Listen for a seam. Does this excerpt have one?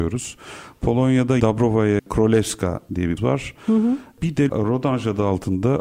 yes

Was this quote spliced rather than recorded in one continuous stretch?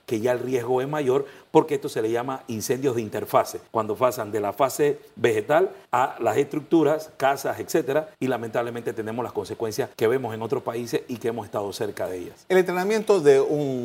yes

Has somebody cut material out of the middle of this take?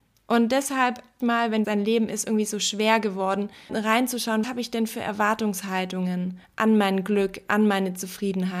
yes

